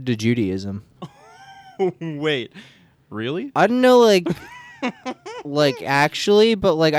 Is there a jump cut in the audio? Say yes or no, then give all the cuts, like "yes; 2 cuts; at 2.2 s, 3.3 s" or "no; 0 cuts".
no; 0 cuts